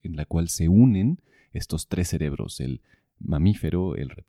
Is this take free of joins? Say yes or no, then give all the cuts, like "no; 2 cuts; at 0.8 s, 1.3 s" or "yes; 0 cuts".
yes; 0 cuts